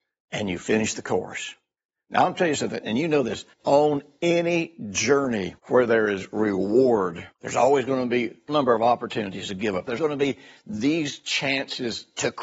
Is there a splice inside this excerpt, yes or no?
yes